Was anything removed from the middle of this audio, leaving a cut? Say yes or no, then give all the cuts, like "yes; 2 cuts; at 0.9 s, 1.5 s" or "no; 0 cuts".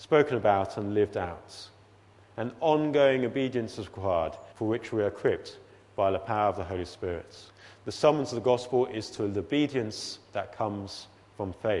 yes; 2 cuts; at 4.5 s, 7.5 s